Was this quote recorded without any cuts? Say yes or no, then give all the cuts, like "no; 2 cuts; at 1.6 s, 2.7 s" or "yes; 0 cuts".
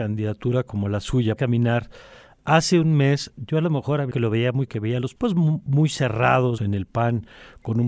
no; 5 cuts; at 1.4 s, 4.1 s, 4.7 s, 5.2 s, 6.6 s